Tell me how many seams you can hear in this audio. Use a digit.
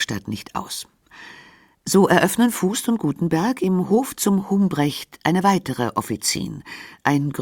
0